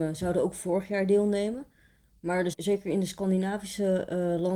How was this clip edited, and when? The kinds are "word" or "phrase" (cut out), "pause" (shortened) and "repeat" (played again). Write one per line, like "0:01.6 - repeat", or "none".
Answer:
0:02.5 - word